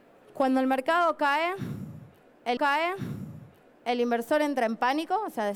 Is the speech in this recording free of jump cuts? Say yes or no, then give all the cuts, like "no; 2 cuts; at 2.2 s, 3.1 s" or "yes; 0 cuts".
no; 1 cut; at 2.6 s